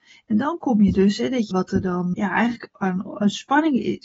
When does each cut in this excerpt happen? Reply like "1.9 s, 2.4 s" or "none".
1.5 s, 2.1 s